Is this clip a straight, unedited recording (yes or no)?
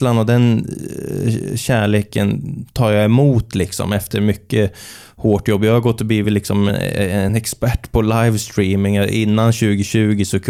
yes